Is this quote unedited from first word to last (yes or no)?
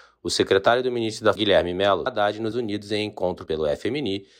no